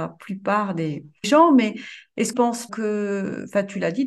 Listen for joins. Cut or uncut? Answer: cut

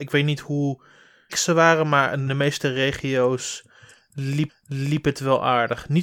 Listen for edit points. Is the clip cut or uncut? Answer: cut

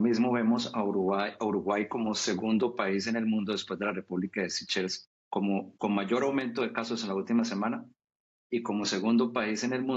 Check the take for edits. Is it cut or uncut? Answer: cut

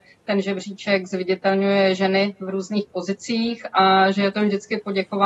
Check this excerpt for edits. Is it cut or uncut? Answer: uncut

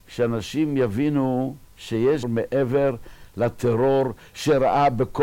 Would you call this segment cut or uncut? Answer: cut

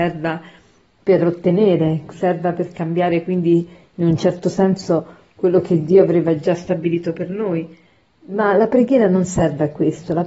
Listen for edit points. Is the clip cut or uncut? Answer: uncut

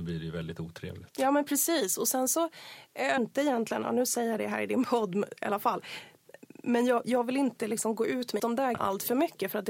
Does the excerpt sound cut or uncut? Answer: cut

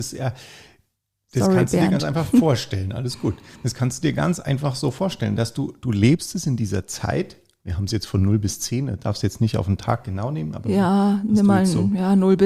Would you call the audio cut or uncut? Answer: uncut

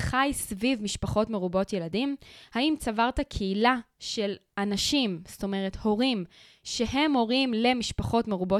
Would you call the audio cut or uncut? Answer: uncut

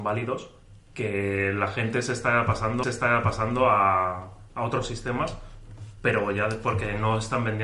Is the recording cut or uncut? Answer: cut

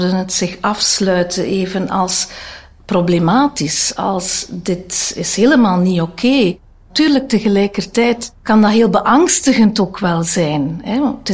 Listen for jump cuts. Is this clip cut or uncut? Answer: uncut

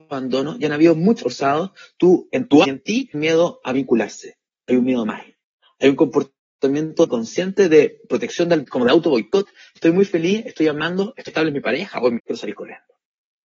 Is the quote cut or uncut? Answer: cut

